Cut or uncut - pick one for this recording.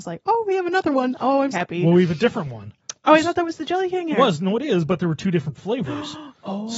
cut